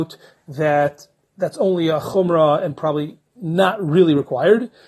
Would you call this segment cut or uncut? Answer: uncut